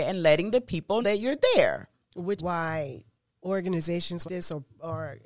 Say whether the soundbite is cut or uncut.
cut